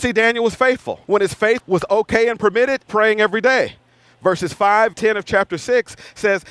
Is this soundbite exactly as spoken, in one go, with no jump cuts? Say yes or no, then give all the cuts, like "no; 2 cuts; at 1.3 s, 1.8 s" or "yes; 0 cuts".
no; 4 cuts; at 1.0 s, 1.6 s, 2.9 s, 4.9 s